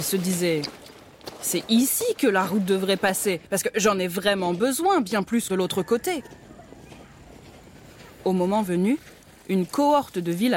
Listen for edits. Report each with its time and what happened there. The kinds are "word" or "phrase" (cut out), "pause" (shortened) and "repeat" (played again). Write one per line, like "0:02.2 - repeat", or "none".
0:03.4 - pause
0:05.5 - phrase